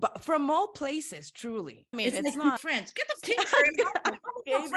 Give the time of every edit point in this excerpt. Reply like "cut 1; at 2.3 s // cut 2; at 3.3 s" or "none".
cut 1; at 1.9 s // cut 2; at 2.6 s // cut 3; at 3.2 s